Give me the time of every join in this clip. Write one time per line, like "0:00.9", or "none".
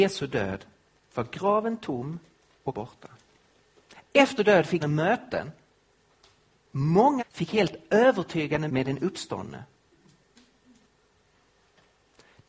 0:02.7
0:04.4
0:04.8
0:07.2
0:08.7